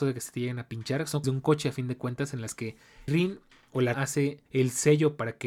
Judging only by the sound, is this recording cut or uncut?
cut